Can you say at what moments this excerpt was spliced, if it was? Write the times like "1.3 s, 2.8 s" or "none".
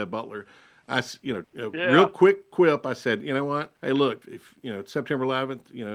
1.4 s, 3.8 s, 4.2 s